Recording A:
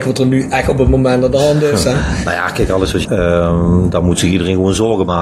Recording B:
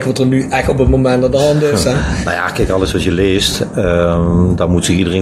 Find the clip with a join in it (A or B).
A